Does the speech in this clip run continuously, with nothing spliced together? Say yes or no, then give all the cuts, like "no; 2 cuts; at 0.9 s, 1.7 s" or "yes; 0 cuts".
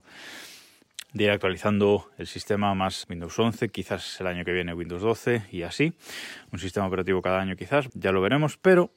no; 2 cuts; at 3.0 s, 7.9 s